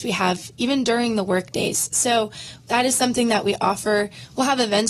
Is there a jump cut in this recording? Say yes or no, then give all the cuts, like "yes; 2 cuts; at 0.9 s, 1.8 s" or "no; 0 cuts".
no; 0 cuts